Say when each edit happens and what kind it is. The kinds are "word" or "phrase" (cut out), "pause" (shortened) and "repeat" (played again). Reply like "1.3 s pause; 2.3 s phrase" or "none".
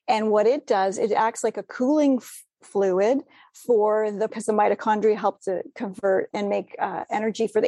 4.3 s word; 6.3 s word